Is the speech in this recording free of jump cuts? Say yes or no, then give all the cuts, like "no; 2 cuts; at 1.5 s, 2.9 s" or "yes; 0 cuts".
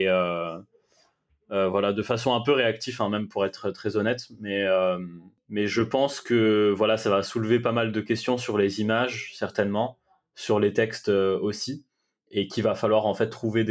yes; 0 cuts